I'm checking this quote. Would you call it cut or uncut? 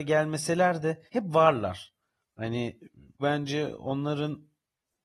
cut